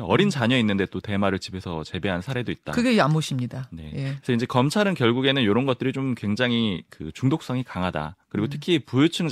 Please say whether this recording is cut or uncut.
uncut